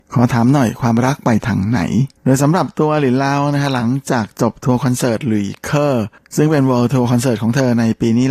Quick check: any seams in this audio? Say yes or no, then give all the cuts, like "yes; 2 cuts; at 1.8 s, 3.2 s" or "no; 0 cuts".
yes; 1 cut; at 2.2 s